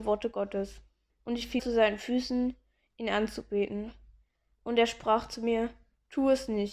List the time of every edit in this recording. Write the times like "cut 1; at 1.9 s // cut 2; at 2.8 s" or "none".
cut 1; at 1.1 s // cut 2; at 1.6 s